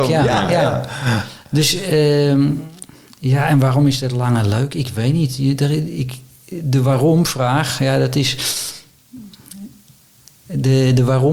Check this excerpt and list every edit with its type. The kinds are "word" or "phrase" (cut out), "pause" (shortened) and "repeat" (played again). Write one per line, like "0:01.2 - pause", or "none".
none